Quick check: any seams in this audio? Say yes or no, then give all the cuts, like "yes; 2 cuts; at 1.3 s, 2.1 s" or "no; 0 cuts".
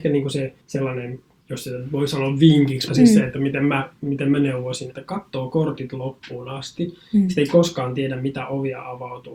yes; 2 cuts; at 2.9 s, 4.9 s